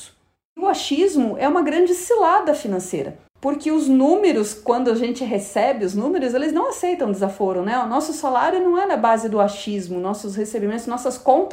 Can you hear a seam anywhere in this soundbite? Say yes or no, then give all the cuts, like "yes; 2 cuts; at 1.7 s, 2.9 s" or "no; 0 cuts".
yes; 1 cut; at 3.3 s